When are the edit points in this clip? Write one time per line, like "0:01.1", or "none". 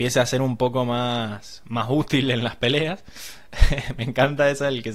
none